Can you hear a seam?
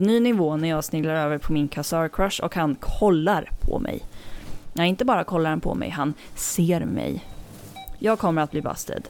no; 0 cuts

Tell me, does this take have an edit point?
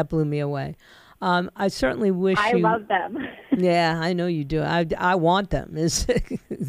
no; 0 cuts

